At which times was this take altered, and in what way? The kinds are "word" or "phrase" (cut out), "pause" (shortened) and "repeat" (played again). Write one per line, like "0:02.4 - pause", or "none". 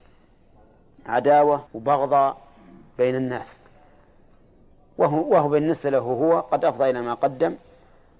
0:01.7 - pause